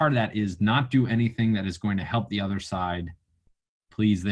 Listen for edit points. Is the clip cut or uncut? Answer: uncut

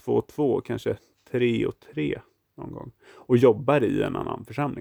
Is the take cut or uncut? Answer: uncut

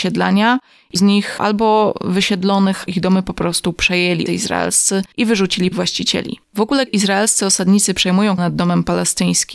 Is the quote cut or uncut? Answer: cut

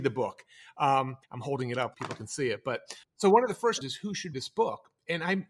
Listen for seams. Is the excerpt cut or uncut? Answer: cut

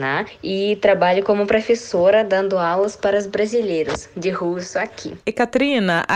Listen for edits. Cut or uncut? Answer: uncut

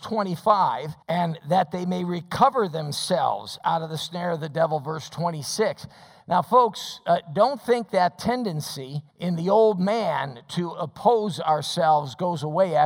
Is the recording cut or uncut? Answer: cut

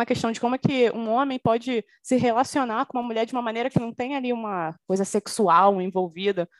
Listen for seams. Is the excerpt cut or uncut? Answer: uncut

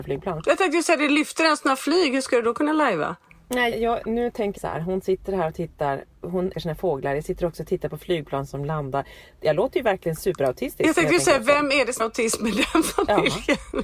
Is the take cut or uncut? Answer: cut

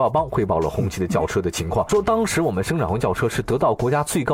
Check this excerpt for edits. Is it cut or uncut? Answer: cut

